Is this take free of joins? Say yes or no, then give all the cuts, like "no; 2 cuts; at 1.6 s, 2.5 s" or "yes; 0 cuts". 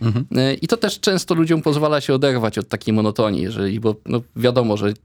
yes; 0 cuts